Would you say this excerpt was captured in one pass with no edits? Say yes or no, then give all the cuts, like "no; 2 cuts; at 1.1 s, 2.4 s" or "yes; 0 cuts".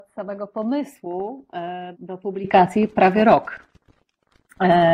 no; 1 cut; at 1.9 s